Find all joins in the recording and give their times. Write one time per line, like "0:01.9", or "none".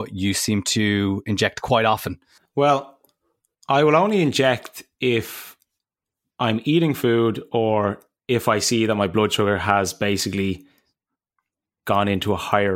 none

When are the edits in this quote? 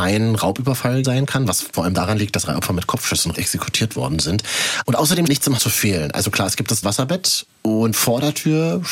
0:01.0
0:01.7
0:02.4
0:03.3
0:05.3
0:05.6
0:06.8
0:07.9

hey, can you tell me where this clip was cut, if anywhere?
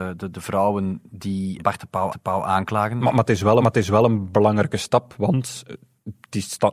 0:01.6
0:02.1
0:03.6

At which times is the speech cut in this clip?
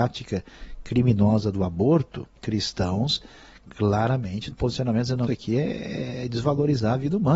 0:02.4
0:04.5
0:05.3

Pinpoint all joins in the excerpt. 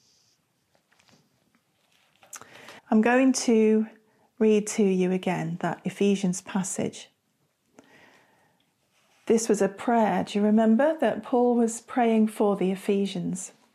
0:02.8

